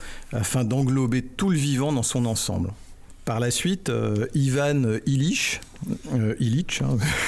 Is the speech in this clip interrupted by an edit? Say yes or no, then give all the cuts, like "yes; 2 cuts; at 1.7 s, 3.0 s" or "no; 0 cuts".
no; 0 cuts